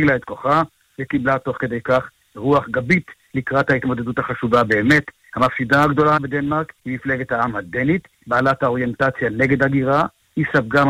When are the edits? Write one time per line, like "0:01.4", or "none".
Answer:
0:06.8